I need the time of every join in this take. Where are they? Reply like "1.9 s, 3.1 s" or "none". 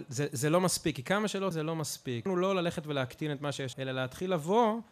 1.5 s, 2.3 s, 3.7 s